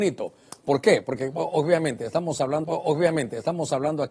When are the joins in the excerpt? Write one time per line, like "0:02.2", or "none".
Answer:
0:02.6